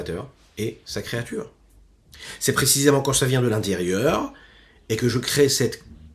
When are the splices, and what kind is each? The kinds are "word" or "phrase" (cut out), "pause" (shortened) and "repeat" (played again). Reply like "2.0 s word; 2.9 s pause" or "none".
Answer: none